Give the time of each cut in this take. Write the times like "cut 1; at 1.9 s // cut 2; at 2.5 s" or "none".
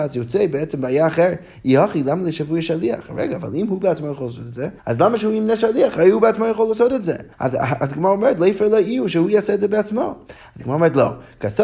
cut 1; at 4.8 s // cut 2; at 7.3 s